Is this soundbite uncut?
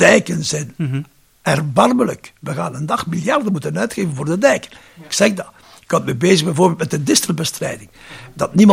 yes; 0 cuts

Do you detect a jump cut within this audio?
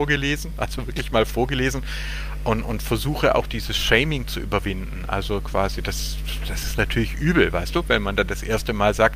no; 0 cuts

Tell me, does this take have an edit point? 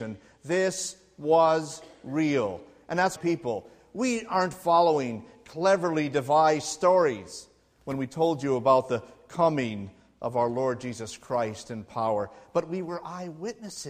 yes; 1 cut; at 3.2 s

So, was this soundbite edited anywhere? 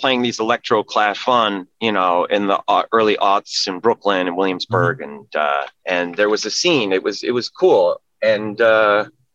yes; 3 cuts; at 1.1 s, 1.7 s, 5.8 s

